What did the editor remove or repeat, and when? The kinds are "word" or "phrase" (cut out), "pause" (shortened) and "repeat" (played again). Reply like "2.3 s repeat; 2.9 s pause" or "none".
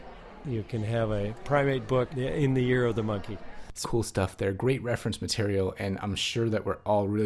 2.1 s phrase; 3.8 s word

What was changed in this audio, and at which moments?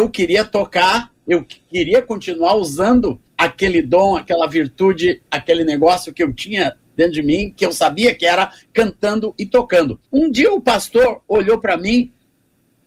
3.3 s pause; 10.0 s pause

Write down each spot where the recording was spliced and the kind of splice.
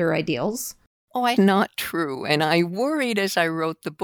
1.4 s phrase

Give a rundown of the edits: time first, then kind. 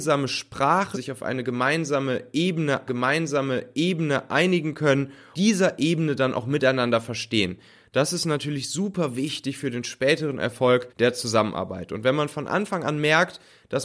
0.9 s phrase; 2.9 s repeat; 5.3 s phrase; 10.9 s pause

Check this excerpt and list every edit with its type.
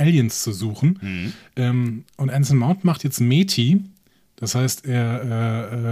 none

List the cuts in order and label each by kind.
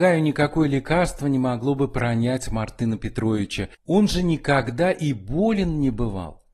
none

